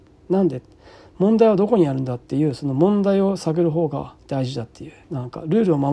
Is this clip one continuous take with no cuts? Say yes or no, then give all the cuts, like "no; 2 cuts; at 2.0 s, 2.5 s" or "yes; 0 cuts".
no; 2 cuts; at 4.2 s, 5.0 s